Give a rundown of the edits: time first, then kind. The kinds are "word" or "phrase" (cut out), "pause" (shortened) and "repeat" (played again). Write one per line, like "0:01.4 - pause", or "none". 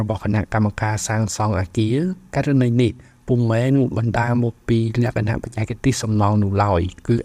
none